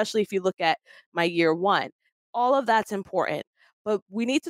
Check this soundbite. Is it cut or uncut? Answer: uncut